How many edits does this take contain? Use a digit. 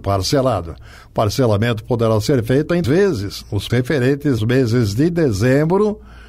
3